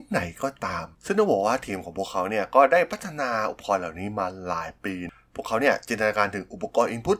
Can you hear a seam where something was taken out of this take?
yes; 1 cut; at 0.9 s

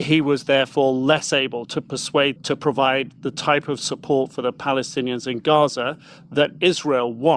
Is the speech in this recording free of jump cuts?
no; 1 cut; at 2.4 s

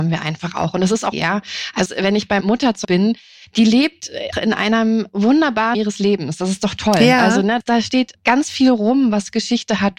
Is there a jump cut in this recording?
yes; 7 cuts; at 1.1 s, 1.9 s, 2.4 s, 2.8 s, 4.3 s, 5.7 s, 8.1 s

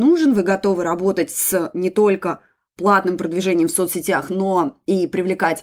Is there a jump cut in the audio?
no; 0 cuts

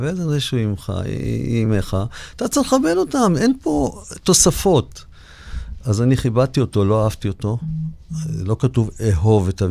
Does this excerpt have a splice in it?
no; 0 cuts

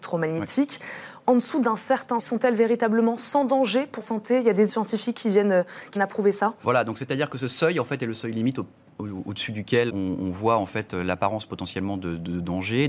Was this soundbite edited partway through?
yes; 5 cuts; at 2.2 s, 4.0 s, 4.7 s, 6.0 s, 9.9 s

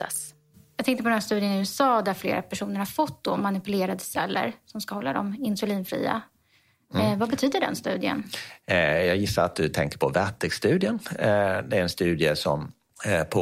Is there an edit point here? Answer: no; 0 cuts

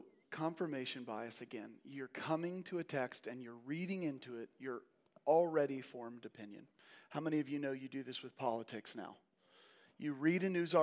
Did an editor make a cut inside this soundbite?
no; 0 cuts

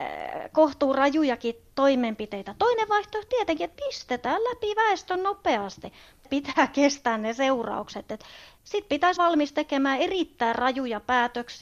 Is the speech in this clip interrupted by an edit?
yes; 3 cuts; at 3.3 s, 6.2 s, 9.2 s

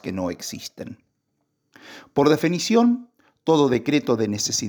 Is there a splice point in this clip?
no; 0 cuts

